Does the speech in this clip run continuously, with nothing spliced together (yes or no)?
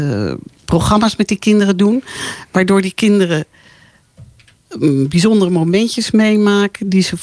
yes